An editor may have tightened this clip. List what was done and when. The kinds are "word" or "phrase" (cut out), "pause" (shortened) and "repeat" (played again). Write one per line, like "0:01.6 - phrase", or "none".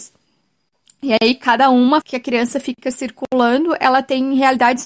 0:02.0 - word